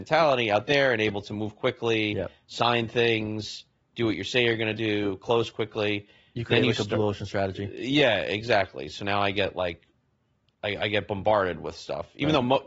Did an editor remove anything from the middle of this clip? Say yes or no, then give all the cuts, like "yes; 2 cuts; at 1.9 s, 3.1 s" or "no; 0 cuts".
no; 0 cuts